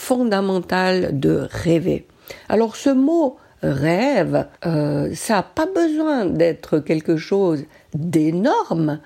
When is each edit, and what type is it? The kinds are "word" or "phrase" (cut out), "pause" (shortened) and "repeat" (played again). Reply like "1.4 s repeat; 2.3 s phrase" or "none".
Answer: 4.5 s pause